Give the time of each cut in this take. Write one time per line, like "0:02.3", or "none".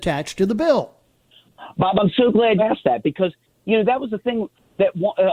0:02.6